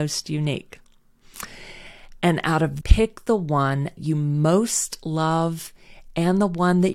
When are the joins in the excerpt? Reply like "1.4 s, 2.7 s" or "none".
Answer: 2.8 s, 4.0 s